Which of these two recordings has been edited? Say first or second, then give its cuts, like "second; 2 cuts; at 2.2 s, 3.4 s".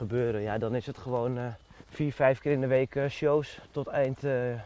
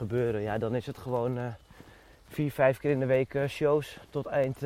first; 1 cut; at 1.8 s